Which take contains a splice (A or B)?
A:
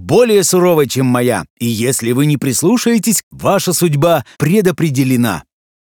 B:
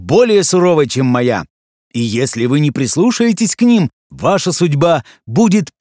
A